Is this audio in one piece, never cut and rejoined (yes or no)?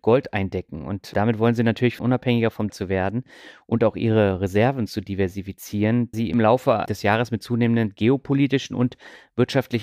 no